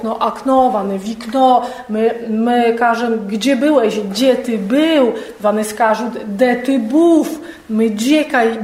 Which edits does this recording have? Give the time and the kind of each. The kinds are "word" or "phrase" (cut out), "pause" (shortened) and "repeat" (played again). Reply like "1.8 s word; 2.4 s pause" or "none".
none